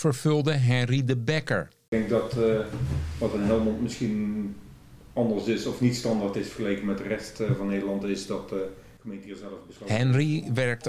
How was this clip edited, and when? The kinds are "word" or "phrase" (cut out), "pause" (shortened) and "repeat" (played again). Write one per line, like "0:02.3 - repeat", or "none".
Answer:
none